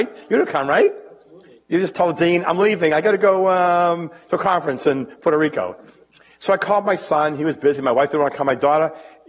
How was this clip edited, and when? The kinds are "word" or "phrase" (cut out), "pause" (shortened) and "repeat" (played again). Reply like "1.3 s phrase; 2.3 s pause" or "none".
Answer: 5.9 s pause